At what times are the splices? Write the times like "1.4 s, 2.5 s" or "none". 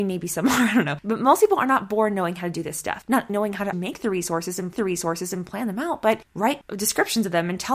3.3 s, 3.7 s, 4.7 s, 6.3 s